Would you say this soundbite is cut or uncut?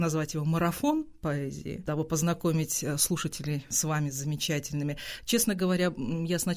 uncut